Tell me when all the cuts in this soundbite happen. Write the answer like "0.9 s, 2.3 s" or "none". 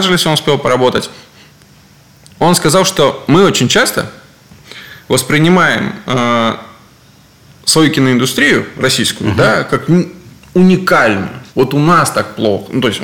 11.5 s